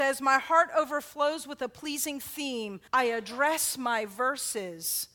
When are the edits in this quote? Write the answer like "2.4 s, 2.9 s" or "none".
2.9 s